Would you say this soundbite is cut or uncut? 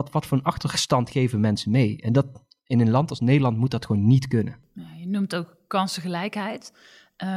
uncut